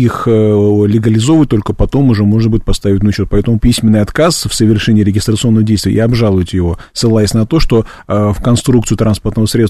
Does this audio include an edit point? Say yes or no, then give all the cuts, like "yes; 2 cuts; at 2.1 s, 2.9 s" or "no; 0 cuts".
yes; 1 cut; at 3.6 s